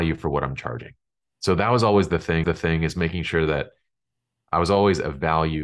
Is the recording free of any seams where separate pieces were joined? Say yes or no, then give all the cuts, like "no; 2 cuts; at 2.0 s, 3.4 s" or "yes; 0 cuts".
no; 1 cut; at 2.4 s